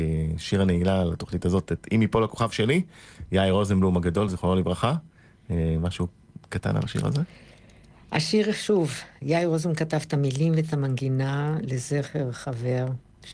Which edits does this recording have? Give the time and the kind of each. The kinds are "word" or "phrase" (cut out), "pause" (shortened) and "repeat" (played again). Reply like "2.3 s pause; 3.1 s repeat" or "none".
none